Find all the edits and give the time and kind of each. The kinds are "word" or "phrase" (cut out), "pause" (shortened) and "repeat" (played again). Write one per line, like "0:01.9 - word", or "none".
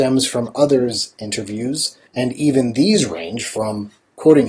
0:02.1 - pause